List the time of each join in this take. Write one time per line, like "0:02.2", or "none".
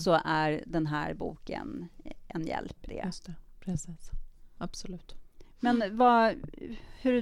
0:02.9